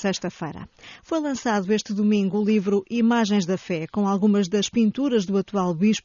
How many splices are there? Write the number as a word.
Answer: zero